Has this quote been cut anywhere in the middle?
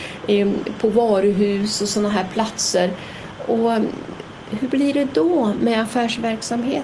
no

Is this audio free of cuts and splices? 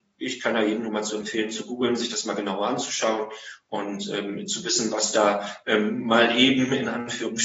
yes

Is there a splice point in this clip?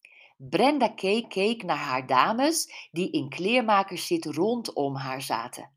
yes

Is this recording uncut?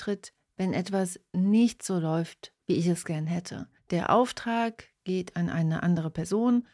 no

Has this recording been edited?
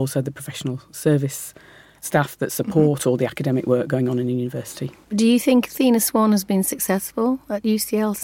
no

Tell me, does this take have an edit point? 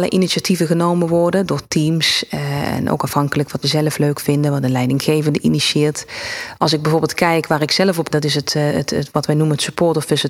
yes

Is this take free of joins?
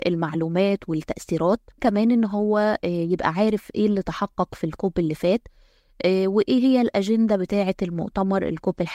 no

